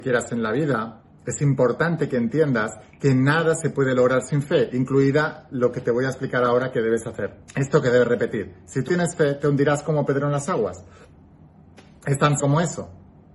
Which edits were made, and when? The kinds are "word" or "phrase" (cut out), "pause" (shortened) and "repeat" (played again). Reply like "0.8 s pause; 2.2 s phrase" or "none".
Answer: 7.5 s pause; 8.9 s word; 12.4 s word